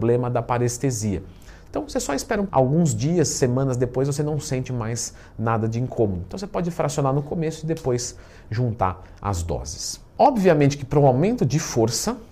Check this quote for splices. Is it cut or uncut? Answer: cut